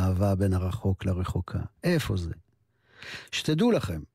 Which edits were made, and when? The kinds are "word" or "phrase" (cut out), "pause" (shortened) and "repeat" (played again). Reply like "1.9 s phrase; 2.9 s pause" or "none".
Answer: 1.7 s pause